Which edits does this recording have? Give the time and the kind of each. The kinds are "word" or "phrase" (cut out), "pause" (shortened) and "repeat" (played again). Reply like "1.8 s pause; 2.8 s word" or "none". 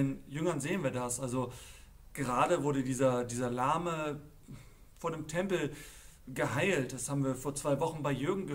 none